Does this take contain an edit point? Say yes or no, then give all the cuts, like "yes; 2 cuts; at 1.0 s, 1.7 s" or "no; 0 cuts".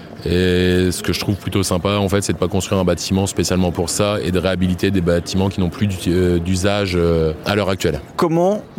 no; 0 cuts